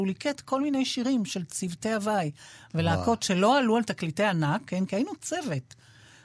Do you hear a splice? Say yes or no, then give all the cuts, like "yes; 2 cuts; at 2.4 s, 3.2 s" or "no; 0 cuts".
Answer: no; 0 cuts